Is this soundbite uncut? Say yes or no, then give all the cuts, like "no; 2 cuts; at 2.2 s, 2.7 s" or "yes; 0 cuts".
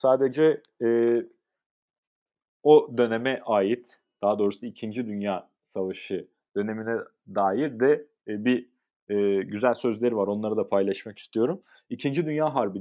yes; 0 cuts